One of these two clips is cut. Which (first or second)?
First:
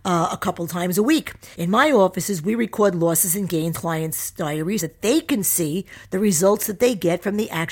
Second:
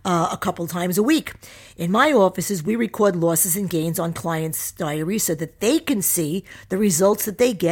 first